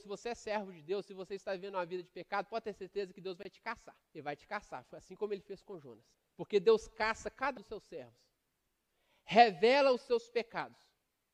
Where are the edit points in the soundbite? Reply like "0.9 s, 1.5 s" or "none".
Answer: 4.1 s, 6.1 s, 7.6 s